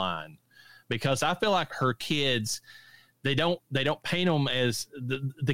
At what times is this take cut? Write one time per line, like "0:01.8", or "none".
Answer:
0:01.7